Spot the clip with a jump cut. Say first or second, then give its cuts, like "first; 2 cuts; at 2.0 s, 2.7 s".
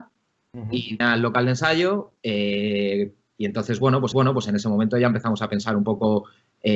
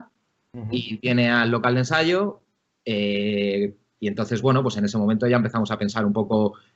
first; 3 cuts; at 1.0 s, 2.2 s, 4.1 s